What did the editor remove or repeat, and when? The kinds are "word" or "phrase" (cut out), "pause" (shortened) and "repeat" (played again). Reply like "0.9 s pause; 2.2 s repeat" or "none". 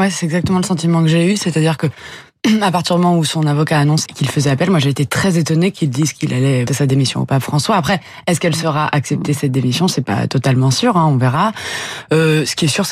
4.1 s word; 6.7 s word